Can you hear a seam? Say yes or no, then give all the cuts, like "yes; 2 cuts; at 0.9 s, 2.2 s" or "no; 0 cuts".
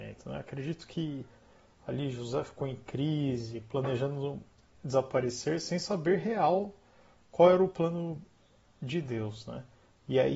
no; 0 cuts